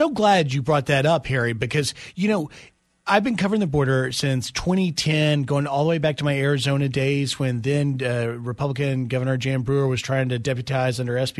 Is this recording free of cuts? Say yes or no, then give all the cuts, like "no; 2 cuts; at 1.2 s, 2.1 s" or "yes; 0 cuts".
yes; 0 cuts